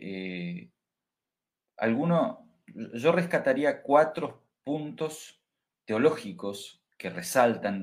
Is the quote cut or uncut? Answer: uncut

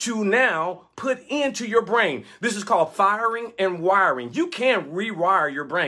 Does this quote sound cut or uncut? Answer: cut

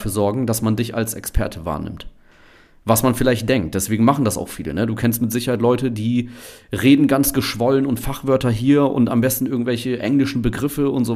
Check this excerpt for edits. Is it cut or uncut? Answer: uncut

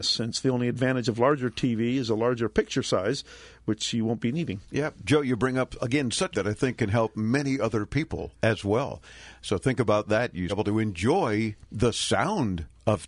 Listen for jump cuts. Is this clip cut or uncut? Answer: cut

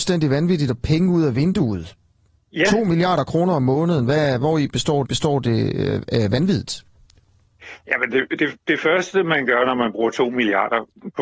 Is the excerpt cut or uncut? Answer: cut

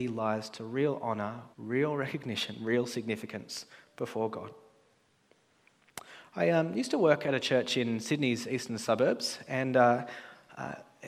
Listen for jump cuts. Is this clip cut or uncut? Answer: cut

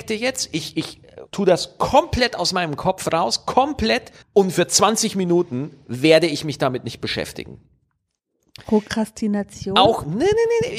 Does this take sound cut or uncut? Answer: cut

